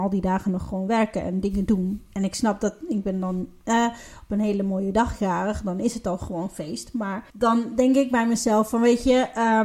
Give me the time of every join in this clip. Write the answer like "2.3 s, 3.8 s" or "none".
7.3 s

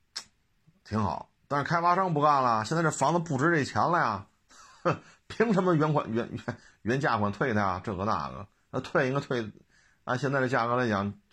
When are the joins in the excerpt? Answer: none

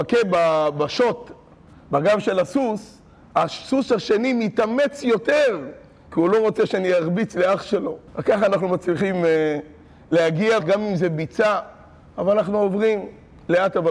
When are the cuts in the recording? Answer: 8.1 s, 10.6 s

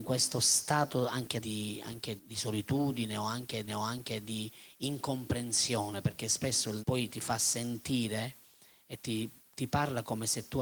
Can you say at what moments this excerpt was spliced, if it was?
1.4 s, 2.2 s, 3.7 s, 6.8 s

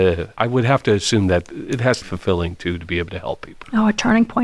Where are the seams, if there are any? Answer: 2.0 s

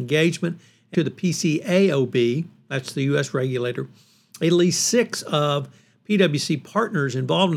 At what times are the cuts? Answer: 0.9 s

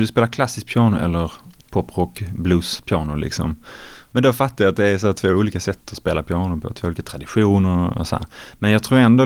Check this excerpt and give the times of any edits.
none

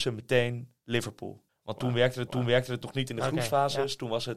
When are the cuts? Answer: 1.5 s, 2.3 s

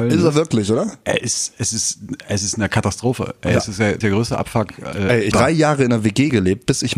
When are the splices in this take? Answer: 4.0 s, 5.3 s

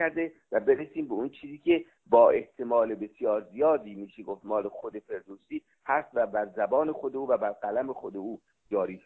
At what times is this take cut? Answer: none

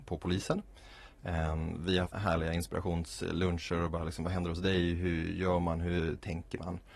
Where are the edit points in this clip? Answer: 2.1 s

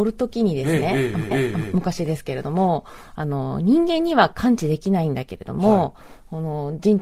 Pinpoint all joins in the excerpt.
1.3 s

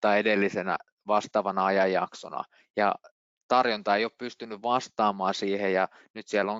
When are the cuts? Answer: none

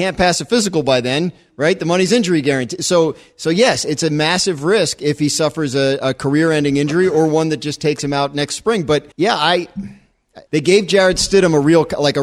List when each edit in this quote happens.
9.1 s, 10.5 s

